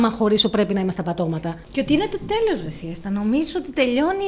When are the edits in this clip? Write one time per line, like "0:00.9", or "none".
0:01.6